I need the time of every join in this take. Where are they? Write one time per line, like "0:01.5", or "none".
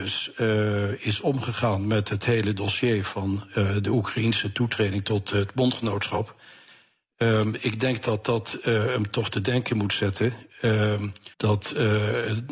0:11.3